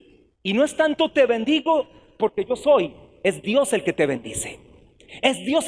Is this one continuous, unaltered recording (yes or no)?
yes